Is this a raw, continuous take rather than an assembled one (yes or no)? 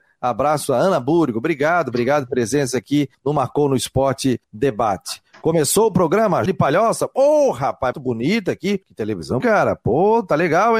no